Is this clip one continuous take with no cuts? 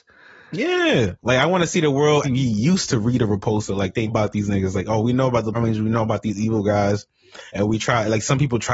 no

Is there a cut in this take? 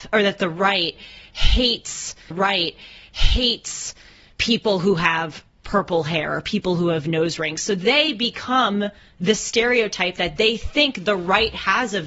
yes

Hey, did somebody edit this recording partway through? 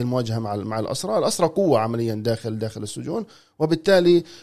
no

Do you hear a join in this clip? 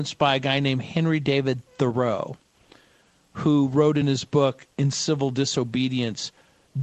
no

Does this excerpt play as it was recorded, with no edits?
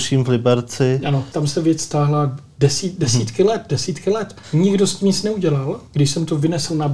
no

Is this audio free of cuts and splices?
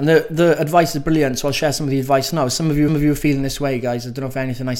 no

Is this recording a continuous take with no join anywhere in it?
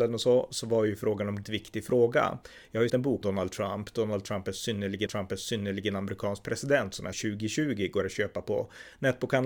no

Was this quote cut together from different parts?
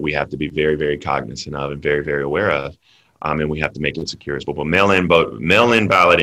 yes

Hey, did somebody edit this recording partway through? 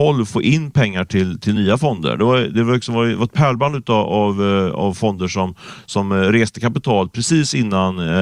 no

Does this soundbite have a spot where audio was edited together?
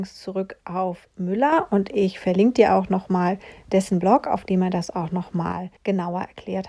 yes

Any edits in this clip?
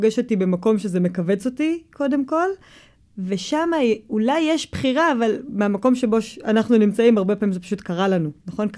no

